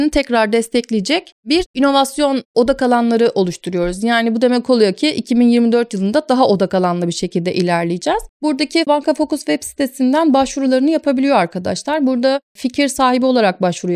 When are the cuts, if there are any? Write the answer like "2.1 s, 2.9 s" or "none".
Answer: 8.9 s